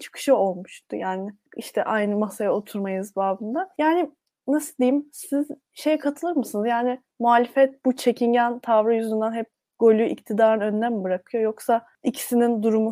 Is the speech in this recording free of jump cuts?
yes; 0 cuts

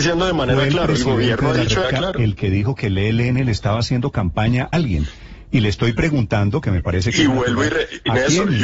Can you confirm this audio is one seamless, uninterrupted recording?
no; 2 cuts; at 1.8 s, 4.7 s

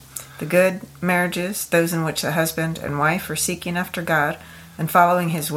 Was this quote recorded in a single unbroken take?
yes; 0 cuts

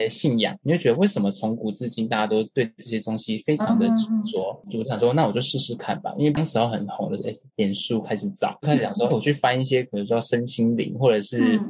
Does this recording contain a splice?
yes; 2 cuts; at 7.5 s, 9.1 s

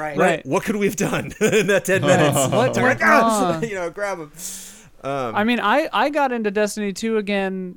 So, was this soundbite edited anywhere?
no; 0 cuts

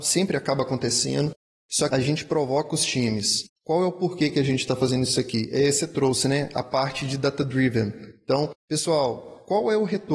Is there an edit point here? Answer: yes; 1 cut; at 1.9 s

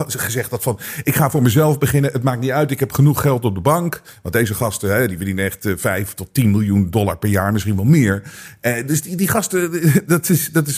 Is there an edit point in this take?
no; 0 cuts

